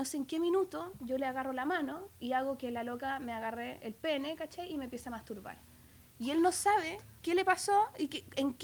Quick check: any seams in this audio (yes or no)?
yes